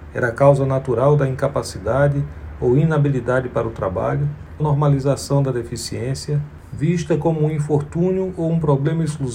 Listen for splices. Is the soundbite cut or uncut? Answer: cut